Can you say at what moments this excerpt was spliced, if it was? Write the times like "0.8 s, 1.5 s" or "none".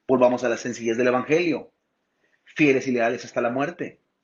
none